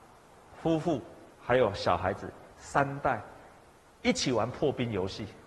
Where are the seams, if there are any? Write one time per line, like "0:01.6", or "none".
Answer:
0:01.3
0:02.5
0:03.6